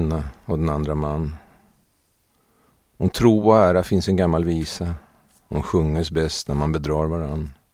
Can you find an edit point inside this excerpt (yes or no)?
no